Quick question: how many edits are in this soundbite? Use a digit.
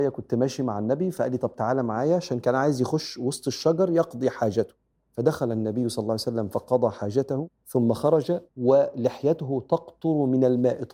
3